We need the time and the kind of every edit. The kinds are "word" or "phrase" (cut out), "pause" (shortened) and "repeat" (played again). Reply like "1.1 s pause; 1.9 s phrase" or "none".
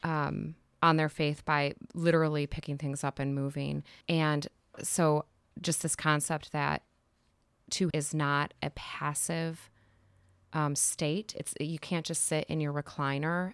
4.0 s pause; 7.9 s phrase